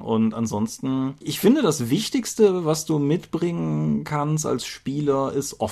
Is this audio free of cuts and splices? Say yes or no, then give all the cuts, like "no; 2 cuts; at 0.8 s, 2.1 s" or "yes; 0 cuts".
yes; 0 cuts